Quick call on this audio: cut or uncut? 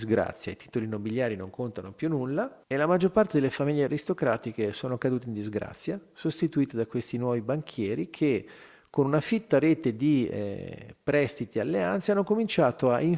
cut